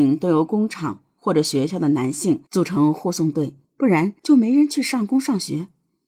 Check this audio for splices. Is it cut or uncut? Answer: cut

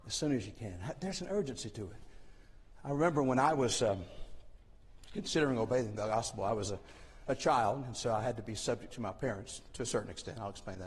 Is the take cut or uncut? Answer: uncut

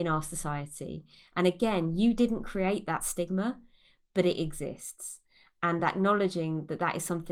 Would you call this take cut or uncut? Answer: uncut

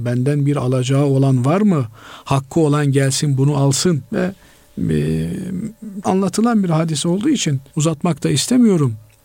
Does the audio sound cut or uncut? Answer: cut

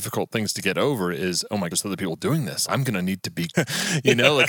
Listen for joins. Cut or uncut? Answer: cut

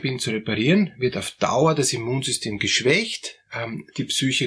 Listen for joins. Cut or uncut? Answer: uncut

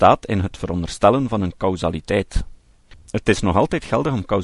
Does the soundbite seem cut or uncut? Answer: uncut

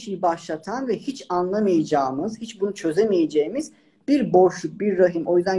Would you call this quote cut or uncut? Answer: uncut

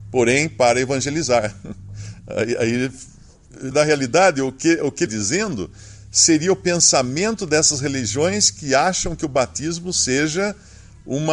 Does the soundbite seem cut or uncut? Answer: cut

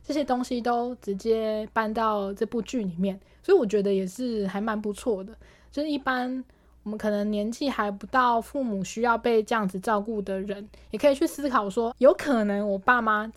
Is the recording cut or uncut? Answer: cut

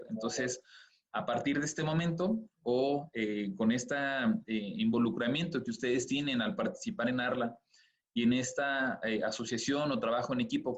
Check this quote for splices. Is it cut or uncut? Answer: uncut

